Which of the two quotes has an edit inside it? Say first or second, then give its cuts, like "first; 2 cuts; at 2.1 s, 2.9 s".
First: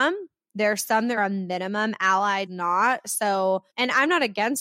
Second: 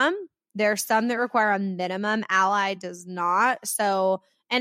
first; 3 cuts; at 1.2 s, 2.5 s, 3.7 s